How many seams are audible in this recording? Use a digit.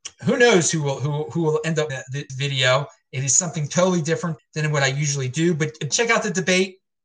4